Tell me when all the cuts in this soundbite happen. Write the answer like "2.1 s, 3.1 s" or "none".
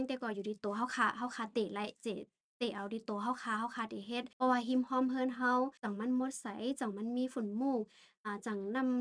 4.3 s, 5.8 s